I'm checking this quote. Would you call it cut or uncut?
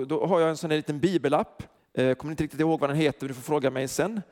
cut